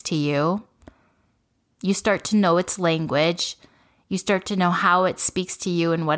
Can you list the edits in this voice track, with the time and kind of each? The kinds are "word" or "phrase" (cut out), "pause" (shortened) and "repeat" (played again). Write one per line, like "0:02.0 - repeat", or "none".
none